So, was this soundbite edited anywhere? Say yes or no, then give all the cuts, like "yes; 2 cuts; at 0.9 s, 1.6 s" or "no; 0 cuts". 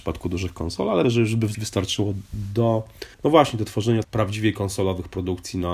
yes; 4 cuts; at 1.0 s, 1.5 s, 3.1 s, 4.0 s